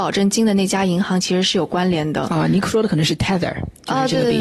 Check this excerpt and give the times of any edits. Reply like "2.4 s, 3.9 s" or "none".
none